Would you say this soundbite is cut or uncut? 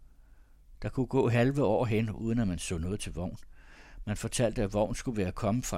uncut